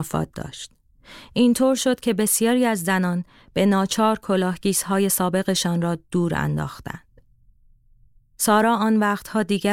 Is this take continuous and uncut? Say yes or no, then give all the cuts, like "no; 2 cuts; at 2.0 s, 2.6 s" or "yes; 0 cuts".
yes; 0 cuts